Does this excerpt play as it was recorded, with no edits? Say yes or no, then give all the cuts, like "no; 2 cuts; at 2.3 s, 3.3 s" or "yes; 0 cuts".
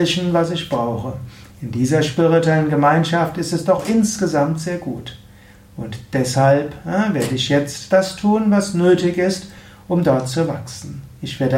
yes; 0 cuts